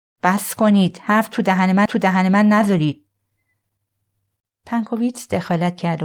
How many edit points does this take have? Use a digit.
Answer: 1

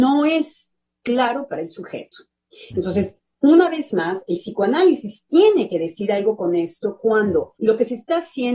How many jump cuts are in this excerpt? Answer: 1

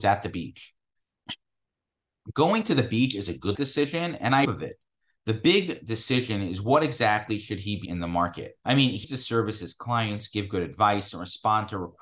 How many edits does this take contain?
5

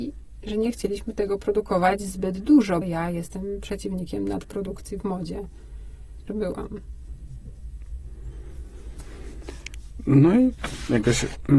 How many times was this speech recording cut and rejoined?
2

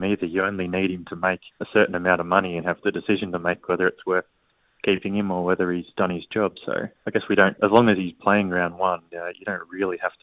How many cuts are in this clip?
4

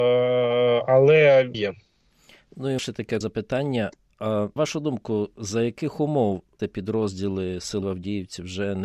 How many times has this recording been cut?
6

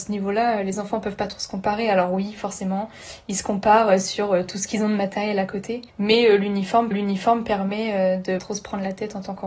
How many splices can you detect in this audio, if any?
3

